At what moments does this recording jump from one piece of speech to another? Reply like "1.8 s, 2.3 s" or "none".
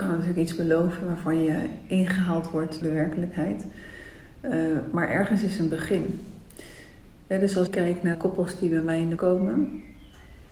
2.8 s, 7.7 s, 8.1 s, 9.2 s

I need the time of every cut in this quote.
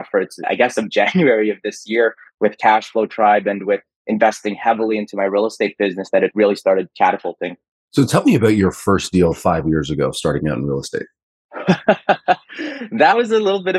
none

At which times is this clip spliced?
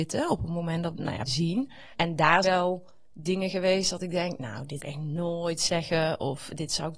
0.9 s, 1.3 s, 1.9 s, 2.4 s, 4.8 s

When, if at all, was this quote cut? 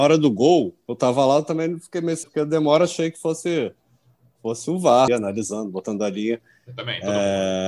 2.2 s, 5.1 s

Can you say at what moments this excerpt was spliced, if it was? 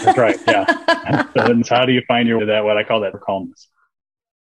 1.6 s, 2.4 s, 3.1 s

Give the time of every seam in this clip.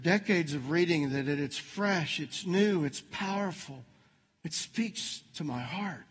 none

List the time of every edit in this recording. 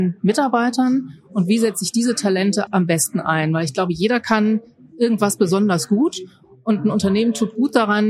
2.7 s

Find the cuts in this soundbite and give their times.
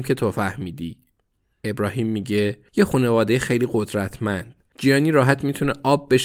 none

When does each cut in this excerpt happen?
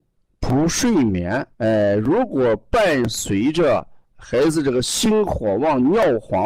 1.5 s

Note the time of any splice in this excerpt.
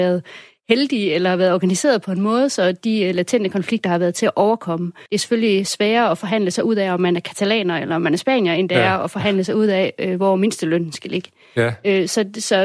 5.1 s

